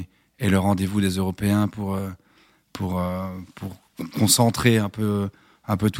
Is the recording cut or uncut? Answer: uncut